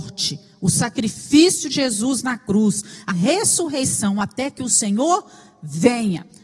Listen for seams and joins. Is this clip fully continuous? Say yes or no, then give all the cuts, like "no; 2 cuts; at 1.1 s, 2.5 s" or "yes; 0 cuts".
no; 2 cuts; at 1.7 s, 3.1 s